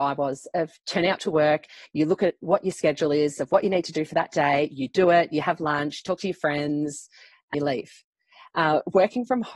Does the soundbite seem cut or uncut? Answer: cut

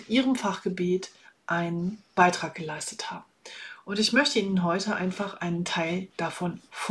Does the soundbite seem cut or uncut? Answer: uncut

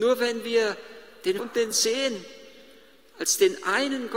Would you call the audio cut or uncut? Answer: cut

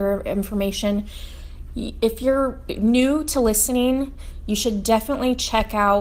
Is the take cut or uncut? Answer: uncut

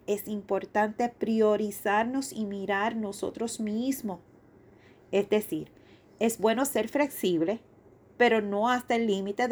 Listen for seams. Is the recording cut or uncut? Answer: uncut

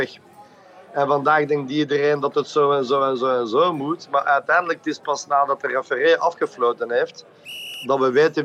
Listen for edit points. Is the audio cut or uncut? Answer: uncut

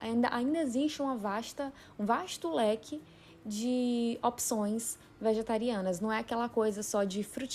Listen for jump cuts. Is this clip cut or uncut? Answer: uncut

